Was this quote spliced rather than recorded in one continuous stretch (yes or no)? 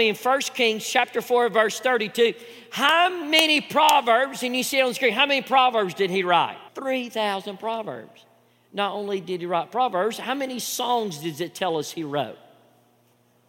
yes